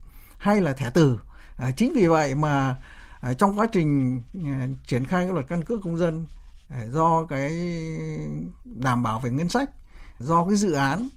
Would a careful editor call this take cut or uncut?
cut